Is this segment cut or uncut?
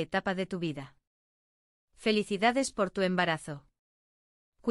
uncut